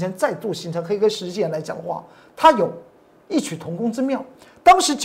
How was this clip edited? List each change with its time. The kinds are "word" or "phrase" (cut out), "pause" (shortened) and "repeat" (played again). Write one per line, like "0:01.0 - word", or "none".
none